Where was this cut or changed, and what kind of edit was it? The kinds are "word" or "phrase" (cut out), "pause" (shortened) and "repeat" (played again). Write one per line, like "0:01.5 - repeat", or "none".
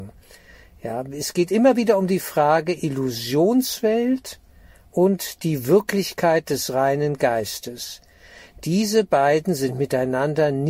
none